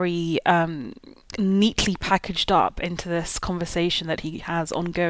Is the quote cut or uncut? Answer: uncut